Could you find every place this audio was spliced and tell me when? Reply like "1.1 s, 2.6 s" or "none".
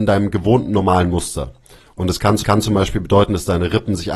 2.4 s